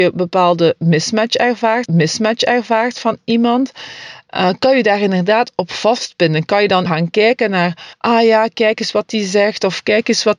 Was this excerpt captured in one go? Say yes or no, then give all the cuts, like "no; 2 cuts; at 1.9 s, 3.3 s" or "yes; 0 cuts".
no; 3 cuts; at 1.9 s, 6.9 s, 7.9 s